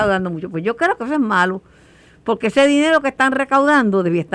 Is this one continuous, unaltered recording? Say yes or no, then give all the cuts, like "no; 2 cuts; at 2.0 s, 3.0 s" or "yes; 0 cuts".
yes; 0 cuts